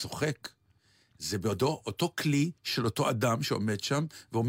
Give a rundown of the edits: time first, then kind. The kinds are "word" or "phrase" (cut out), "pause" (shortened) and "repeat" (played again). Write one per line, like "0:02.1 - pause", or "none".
0:02.6 - pause